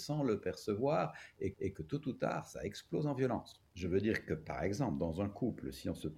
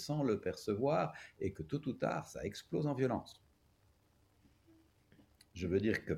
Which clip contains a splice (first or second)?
first